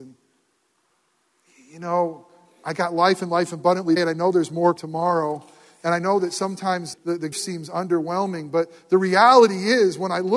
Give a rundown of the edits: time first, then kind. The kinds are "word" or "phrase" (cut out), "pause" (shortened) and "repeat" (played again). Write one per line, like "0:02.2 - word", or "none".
0:04.0 - word
0:04.8 - word
0:06.9 - word
0:07.3 - word